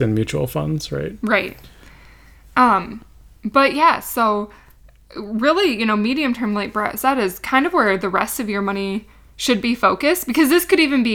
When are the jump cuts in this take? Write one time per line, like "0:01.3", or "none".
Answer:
none